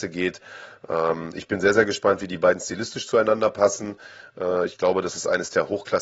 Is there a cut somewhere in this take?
no; 0 cuts

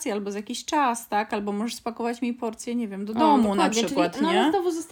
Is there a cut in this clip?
no; 0 cuts

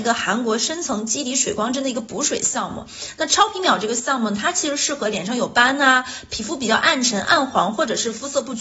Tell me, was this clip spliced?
no; 0 cuts

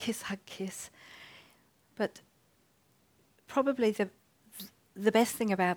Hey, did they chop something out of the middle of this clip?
no; 0 cuts

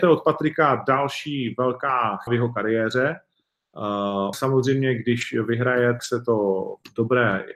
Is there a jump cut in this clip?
yes; 3 cuts; at 2.3 s, 4.3 s, 6.0 s

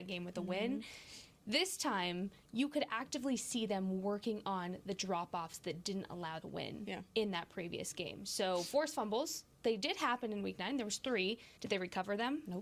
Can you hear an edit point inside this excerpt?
yes; 3 cuts; at 2.4 s, 6.4 s, 11.6 s

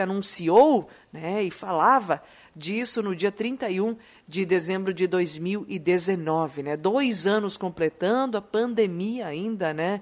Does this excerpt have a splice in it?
no; 0 cuts

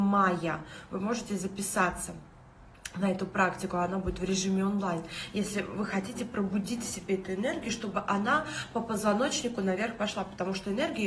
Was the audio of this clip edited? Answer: no; 0 cuts

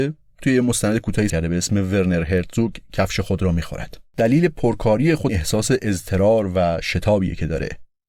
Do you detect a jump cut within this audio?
yes; 3 cuts; at 1.3 s, 4.1 s, 5.3 s

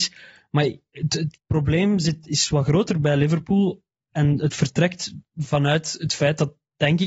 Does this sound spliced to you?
no; 0 cuts

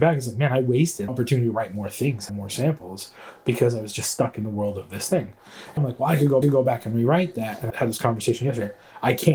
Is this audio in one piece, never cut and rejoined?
no; 5 cuts; at 1.1 s, 2.3 s, 5.8 s, 6.4 s, 7.7 s

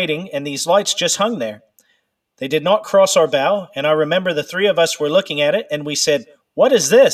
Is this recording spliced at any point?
no; 0 cuts

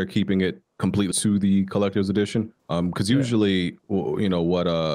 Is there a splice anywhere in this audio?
yes; 2 cuts; at 1.1 s, 2.6 s

